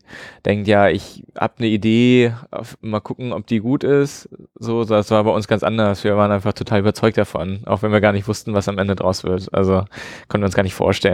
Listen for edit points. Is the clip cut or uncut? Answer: uncut